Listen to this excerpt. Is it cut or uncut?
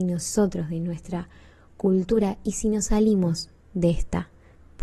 uncut